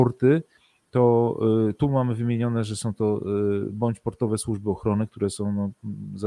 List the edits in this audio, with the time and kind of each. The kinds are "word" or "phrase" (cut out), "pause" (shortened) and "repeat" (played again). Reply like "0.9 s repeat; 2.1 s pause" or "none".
none